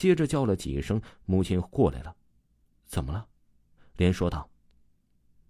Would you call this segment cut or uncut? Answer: uncut